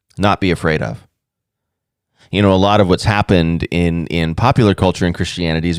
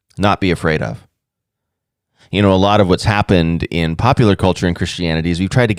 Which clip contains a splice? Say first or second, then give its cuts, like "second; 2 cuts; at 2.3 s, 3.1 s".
second; 1 cut; at 3.7 s